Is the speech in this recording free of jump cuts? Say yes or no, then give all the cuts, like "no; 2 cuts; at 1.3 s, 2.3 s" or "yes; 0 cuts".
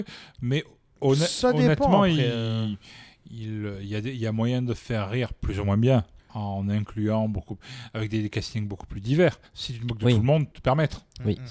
no; 3 cuts; at 6.2 s, 9.5 s, 10.5 s